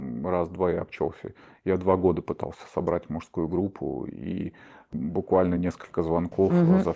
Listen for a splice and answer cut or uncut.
uncut